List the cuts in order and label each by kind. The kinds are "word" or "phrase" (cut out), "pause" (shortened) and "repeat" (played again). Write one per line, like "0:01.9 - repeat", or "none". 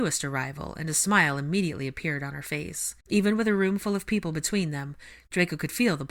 0:03.0 - pause